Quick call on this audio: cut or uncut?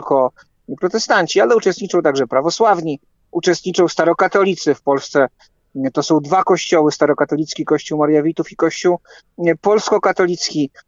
uncut